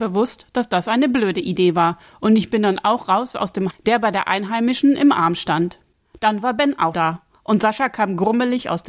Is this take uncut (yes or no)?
no